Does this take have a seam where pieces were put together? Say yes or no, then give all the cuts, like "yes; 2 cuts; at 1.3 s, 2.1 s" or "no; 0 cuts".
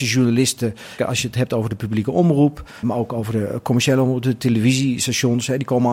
yes; 2 cuts; at 1.0 s, 2.8 s